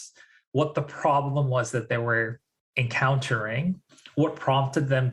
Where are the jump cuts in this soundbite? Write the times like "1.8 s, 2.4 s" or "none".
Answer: none